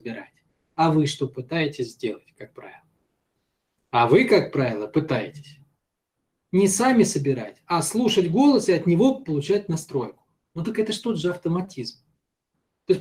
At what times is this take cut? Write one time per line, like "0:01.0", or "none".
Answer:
none